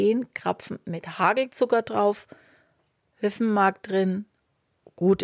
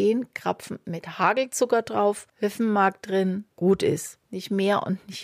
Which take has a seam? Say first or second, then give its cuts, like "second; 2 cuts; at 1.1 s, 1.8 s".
second; 3 cuts; at 2.3 s, 3.5 s, 4.3 s